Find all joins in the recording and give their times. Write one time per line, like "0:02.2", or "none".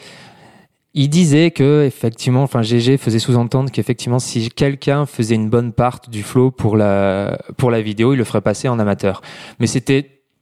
none